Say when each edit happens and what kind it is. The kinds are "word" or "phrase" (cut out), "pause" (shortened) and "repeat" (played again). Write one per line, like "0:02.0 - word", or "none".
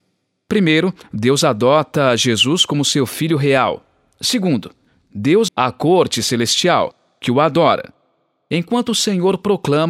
0:05.5 - phrase